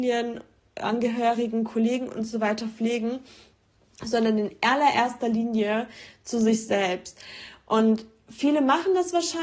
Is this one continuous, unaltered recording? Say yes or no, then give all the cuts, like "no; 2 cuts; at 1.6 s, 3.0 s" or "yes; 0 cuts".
yes; 0 cuts